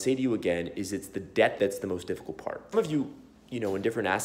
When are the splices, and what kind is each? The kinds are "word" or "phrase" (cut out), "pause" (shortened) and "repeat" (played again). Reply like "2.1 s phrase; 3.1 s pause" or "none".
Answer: 1.6 s word; 2.7 s word